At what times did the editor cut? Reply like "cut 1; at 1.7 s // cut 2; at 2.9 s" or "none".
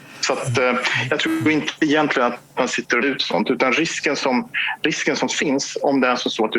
cut 1; at 3.0 s